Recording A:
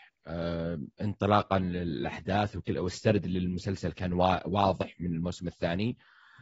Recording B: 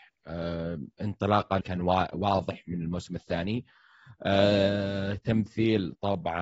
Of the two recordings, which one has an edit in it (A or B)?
B